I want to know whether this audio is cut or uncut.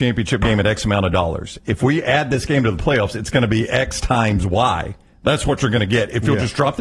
uncut